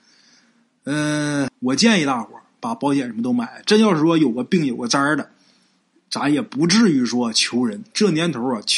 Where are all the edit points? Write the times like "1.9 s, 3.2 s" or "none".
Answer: 1.5 s